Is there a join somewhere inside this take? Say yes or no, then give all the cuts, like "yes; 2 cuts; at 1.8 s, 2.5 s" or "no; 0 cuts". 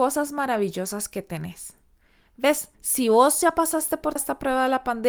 yes; 2 cuts; at 2.7 s, 4.2 s